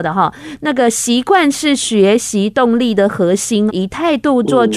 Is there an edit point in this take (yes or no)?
yes